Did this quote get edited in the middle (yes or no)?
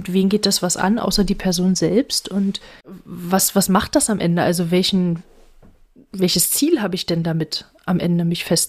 no